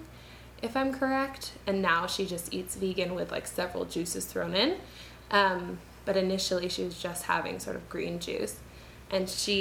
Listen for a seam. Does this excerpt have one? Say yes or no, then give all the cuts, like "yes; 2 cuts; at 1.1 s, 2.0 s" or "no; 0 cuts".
no; 0 cuts